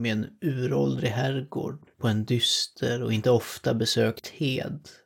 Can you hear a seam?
yes; 1 cut; at 1.9 s

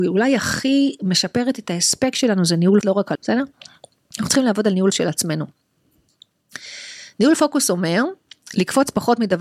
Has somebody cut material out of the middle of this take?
yes; 3 cuts; at 2.8 s, 3.1 s, 4.9 s

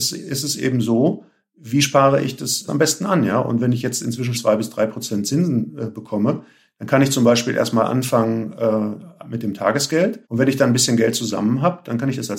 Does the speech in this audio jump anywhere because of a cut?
yes; 3 cuts; at 2.7 s, 4.3 s, 10.2 s

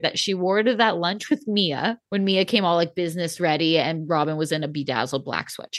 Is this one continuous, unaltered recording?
no; 1 cut; at 2.1 s

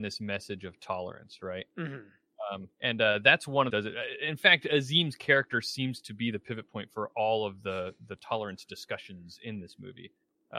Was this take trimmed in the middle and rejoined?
yes; 2 cuts; at 2.7 s, 3.7 s

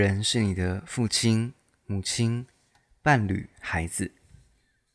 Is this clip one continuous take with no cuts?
yes; 0 cuts

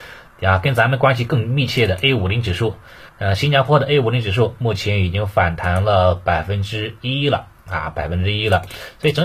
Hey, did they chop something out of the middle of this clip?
yes; 1 cut; at 3.1 s

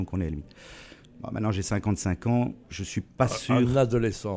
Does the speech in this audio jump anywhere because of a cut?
yes; 1 cut; at 2.6 s

